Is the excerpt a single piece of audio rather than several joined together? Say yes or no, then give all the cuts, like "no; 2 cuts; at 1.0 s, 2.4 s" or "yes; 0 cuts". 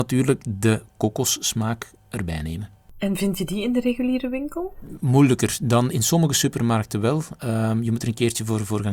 no; 1 cut; at 5.9 s